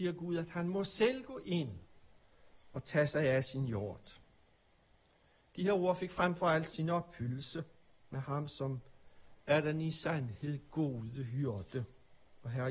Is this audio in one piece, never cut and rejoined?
yes; 0 cuts

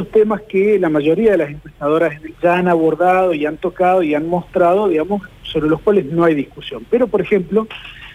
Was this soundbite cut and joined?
yes; 1 cut; at 2.3 s

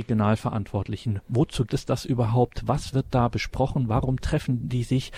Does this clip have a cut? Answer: yes; 1 cut; at 1.7 s

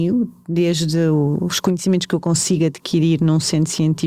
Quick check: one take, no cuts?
yes; 0 cuts

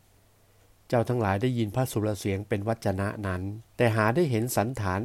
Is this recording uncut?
no; 1 cut; at 3.7 s

